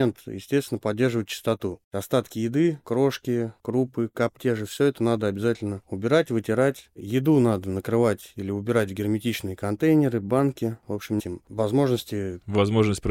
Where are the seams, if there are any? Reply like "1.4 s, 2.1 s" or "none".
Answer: 4.4 s, 11.2 s

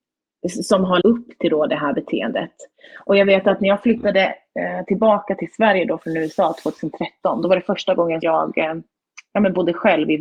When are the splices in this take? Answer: 1.0 s, 8.2 s

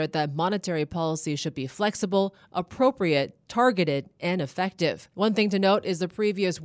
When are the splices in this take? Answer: 5.1 s

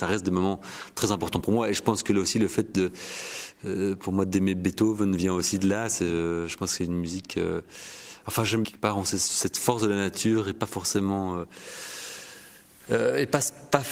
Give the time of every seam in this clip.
8.6 s

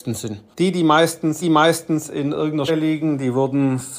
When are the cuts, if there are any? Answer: 1.4 s, 2.7 s

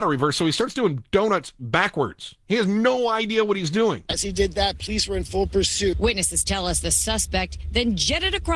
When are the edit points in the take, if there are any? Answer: none

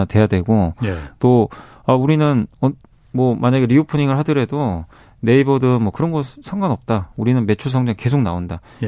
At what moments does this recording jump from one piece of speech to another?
5.9 s

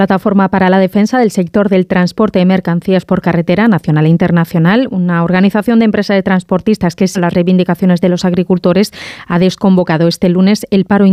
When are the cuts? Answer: 7.1 s

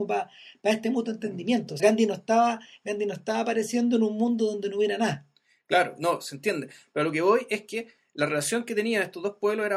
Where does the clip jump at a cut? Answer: 1.8 s

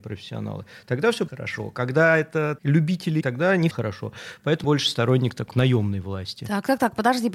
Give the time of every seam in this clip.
1.3 s, 2.6 s, 3.2 s, 3.7 s, 4.6 s, 5.5 s

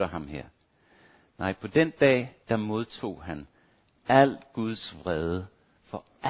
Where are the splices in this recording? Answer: 2.4 s

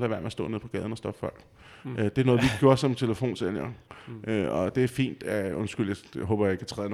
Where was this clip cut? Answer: none

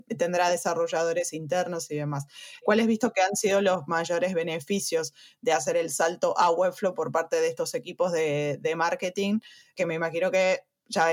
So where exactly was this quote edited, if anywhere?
none

